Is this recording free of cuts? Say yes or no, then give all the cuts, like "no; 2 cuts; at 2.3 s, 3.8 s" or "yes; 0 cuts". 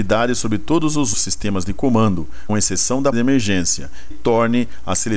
no; 4 cuts; at 1.1 s, 2.5 s, 3.1 s, 4.1 s